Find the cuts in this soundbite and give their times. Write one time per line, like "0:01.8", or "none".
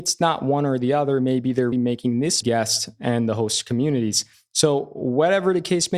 0:01.7
0:02.4